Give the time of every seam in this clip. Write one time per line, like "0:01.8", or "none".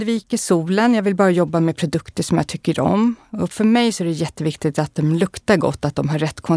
none